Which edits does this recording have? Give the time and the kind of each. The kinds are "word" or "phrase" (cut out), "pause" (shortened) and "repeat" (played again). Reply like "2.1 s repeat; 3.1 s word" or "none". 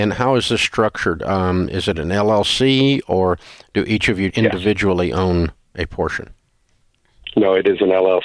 4.3 s word